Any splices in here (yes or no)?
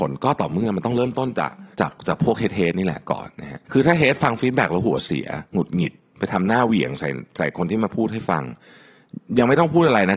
yes